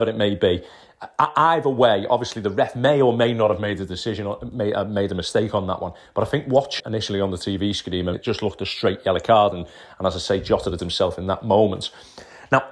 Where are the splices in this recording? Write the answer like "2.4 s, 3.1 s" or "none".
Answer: 6.8 s, 8.1 s, 10.8 s